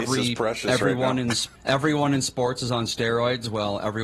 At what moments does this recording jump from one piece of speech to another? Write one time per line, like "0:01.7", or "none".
0:01.5